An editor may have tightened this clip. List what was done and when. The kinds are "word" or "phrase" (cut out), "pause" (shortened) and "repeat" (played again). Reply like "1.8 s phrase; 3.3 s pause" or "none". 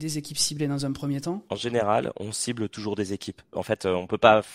1.5 s pause